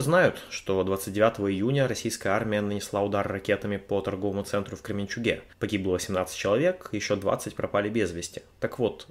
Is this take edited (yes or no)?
no